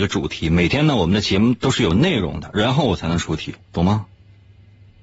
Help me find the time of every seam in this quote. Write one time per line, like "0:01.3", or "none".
0:03.6

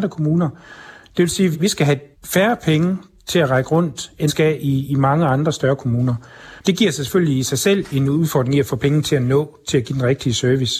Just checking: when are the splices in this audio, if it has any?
0:01.5
0:02.1
0:04.3
0:06.6

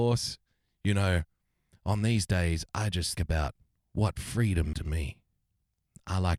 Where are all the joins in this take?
0:03.2
0:04.7

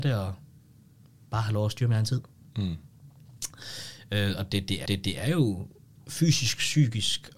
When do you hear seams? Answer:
0:04.9

